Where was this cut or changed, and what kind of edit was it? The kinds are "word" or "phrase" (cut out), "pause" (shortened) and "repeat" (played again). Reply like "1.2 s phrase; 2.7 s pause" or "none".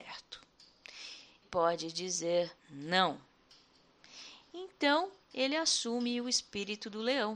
1.4 s phrase; 2.6 s pause; 5.2 s pause